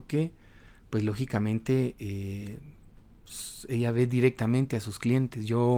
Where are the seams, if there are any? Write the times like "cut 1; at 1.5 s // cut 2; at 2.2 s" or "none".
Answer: none